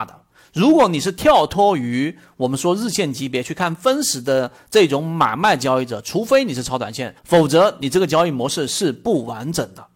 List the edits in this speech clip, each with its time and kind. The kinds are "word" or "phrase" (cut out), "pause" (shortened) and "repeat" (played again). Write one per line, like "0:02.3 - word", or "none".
0:07.2 - pause